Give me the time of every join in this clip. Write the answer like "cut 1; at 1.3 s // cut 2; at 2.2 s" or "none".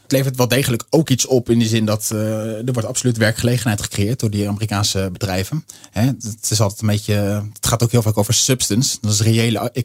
none